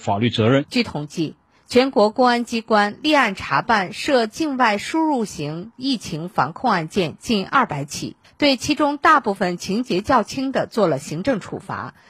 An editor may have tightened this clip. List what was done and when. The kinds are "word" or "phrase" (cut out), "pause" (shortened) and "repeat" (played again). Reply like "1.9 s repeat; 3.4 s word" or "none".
none

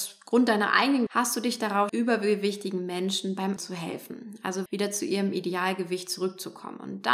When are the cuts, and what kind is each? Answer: 1.1 s word; 1.9 s word; 3.6 s word; 4.7 s word

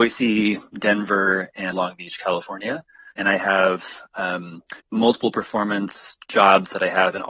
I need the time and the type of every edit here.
1.7 s word; 3.1 s pause; 4.8 s pause

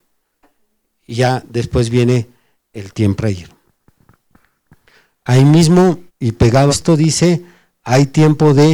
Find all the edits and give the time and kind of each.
3.2 s word; 6.1 s pause; 6.7 s word

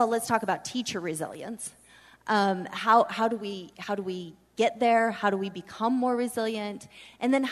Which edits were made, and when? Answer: none

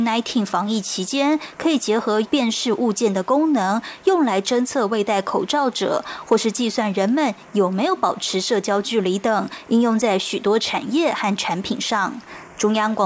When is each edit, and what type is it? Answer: 2.2 s word

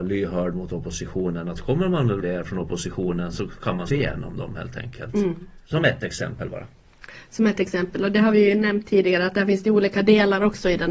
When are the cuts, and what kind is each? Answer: 2.2 s word; 3.9 s word; 5.6 s pause

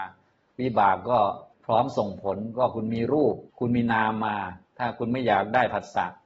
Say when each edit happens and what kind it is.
1.5 s pause; 3.5 s pause

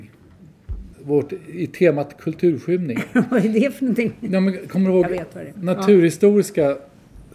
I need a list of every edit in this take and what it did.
0.9 s pause

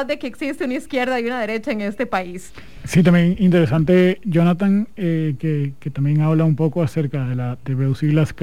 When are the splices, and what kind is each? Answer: none

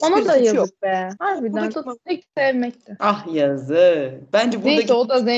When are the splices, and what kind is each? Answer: 1.7 s word; 2.2 s word

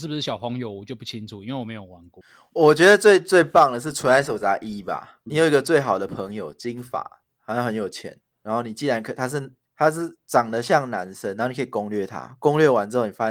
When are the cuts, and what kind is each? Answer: 5.3 s word

